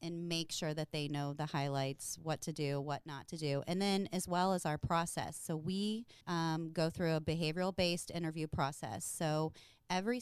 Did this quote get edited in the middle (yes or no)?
yes